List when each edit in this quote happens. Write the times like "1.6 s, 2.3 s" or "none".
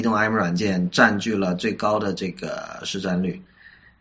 none